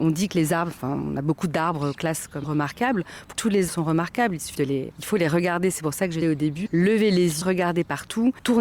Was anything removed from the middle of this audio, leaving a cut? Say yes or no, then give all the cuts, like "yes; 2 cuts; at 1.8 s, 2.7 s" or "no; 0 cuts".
yes; 9 cuts; at 1.9 s, 2.4 s, 3.3 s, 3.7 s, 4.5 s, 4.9 s, 6.2 s, 6.7 s, 7.4 s